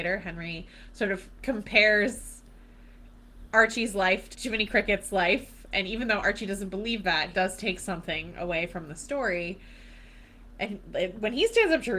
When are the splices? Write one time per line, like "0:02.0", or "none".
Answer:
0:04.3
0:05.7
0:07.3

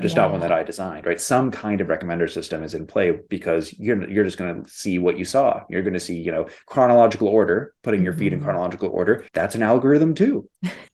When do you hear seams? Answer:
0:07.8
0:09.3

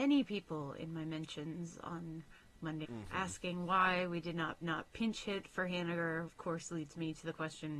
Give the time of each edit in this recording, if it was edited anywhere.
0:02.8
0:04.6
0:06.3

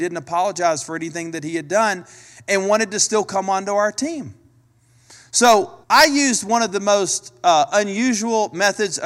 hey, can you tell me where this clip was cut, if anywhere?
0:05.8

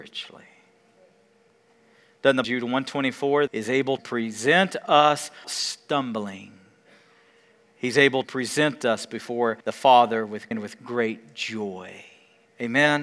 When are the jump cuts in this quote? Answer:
0:02.4
0:03.5
0:04.0
0:05.4
0:08.2
0:09.6
0:10.5

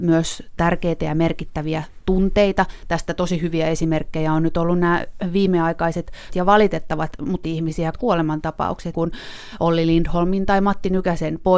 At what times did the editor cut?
0:06.3
0:07.4
0:07.9
0:08.9

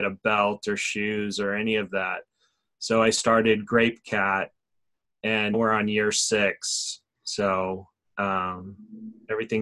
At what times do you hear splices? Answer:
0:05.5

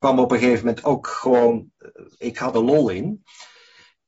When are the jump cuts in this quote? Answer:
0:02.1
0:02.5

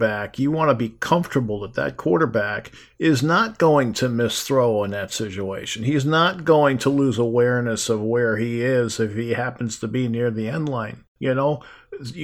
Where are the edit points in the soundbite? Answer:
none

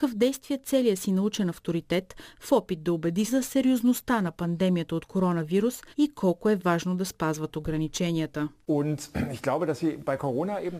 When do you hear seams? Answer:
0:03.3
0:05.9

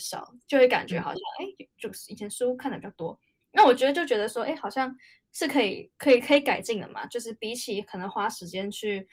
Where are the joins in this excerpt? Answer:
none

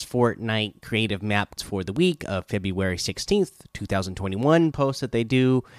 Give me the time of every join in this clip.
0:01.6
0:04.7

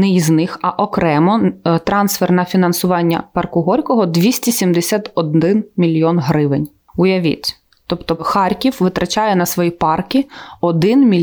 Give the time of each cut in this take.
none

